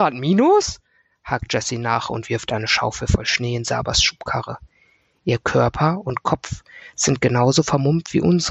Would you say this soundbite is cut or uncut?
uncut